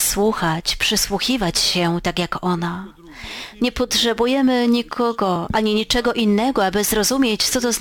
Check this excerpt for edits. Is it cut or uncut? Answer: uncut